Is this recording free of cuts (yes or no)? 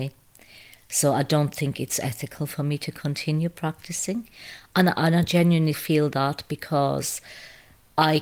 no